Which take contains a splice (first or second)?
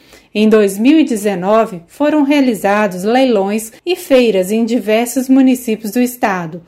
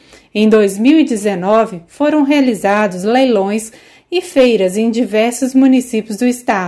first